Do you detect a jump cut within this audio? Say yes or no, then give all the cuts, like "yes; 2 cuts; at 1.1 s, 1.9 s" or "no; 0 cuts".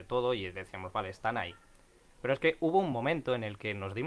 no; 0 cuts